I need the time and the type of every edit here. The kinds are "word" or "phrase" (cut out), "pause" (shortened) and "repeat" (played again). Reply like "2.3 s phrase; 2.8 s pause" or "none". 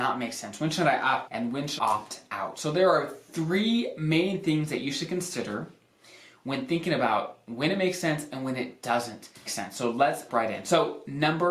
1.3 s word; 1.8 s word; 9.5 s word; 10.3 s word